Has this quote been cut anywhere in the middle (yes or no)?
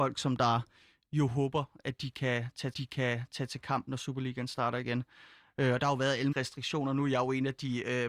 yes